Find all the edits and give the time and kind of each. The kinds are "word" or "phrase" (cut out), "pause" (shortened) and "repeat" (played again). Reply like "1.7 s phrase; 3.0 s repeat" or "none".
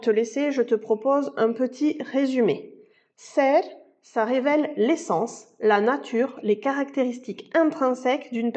none

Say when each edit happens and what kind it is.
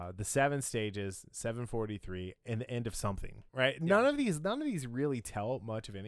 2.4 s pause; 3.5 s pause

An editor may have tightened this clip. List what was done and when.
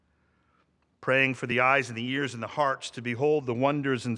none

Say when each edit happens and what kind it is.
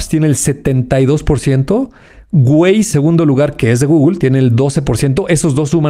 2.9 s word

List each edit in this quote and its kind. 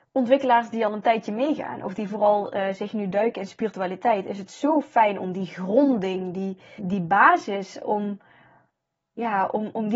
6.8 s word

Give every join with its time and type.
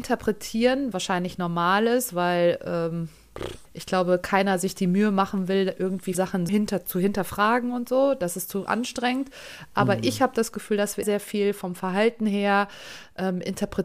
0.9 s word; 3.7 s pause; 6.1 s word; 6.5 s word; 11.0 s phrase

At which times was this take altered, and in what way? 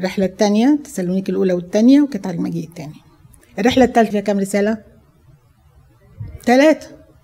4.1 s word

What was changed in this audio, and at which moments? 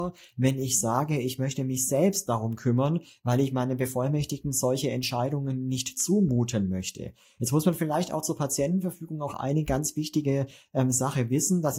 none

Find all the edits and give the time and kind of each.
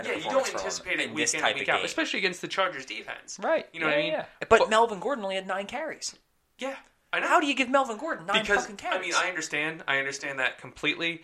none

